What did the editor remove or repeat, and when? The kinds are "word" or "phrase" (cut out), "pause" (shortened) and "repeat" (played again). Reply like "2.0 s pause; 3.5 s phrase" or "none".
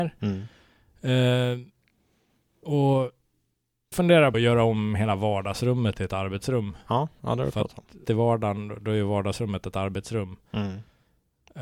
3.9 s word; 4.3 s word; 8.0 s word